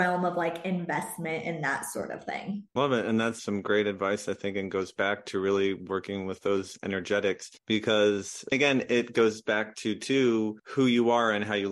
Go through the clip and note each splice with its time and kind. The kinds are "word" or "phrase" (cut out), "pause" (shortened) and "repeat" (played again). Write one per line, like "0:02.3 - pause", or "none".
0:02.7 - pause